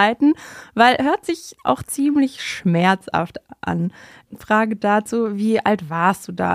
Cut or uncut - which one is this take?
uncut